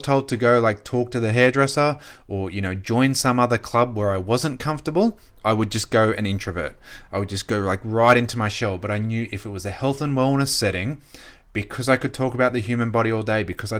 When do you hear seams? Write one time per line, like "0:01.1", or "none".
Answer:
none